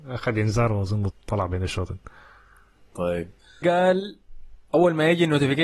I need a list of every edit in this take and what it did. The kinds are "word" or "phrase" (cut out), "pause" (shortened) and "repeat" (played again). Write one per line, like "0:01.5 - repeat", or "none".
0:01.1 - word
0:03.6 - word